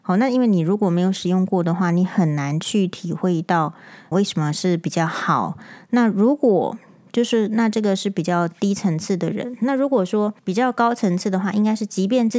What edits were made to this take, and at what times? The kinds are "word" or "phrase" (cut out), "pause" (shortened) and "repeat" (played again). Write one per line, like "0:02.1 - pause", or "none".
0:04.1 - word
0:10.4 - pause